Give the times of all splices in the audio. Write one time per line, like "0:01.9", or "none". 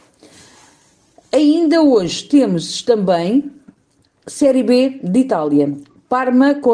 none